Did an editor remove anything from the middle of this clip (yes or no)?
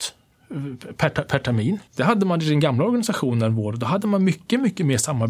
yes